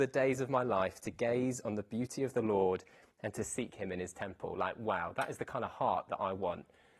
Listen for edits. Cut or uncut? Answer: uncut